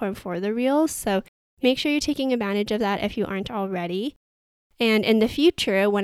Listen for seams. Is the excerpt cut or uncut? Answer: uncut